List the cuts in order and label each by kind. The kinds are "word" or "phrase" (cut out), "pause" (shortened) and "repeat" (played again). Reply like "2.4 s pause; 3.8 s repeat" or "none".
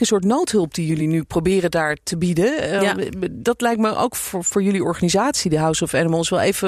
none